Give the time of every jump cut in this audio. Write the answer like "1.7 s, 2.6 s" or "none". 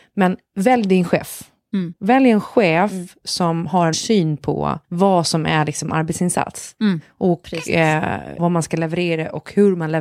3.9 s, 4.8 s, 8.4 s